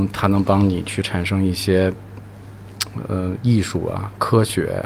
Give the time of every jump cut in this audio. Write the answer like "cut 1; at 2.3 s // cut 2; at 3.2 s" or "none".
none